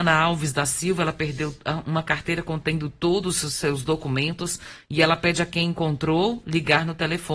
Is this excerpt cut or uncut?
uncut